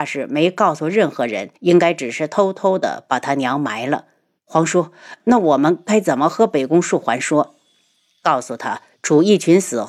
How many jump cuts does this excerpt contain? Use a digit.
2